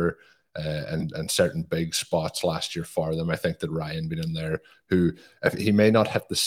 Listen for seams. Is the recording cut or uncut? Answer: uncut